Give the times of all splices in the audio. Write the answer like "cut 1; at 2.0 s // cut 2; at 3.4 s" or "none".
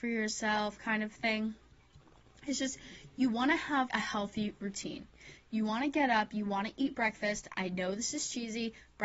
cut 1; at 3.9 s